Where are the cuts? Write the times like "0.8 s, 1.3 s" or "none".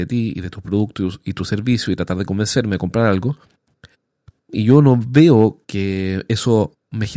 none